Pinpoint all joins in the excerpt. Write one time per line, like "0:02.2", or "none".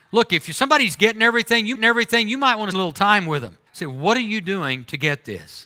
0:01.8
0:02.7
0:03.7